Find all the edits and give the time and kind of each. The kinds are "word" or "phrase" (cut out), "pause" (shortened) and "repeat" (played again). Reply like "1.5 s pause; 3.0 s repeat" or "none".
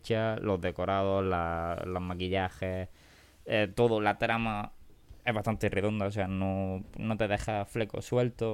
none